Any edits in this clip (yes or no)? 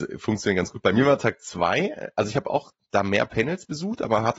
no